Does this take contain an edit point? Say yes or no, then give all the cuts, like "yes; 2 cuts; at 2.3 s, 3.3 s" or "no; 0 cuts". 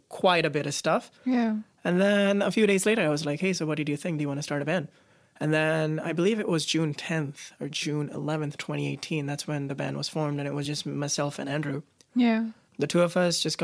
no; 0 cuts